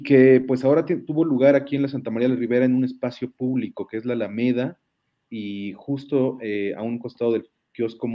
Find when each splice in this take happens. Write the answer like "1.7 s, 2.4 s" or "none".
none